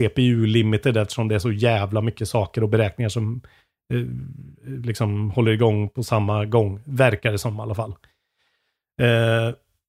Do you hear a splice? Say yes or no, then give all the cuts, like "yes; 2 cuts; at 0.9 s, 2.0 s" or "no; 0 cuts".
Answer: no; 0 cuts